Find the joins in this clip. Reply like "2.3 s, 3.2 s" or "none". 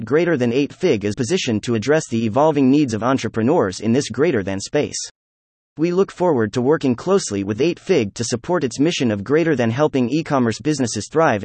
1.1 s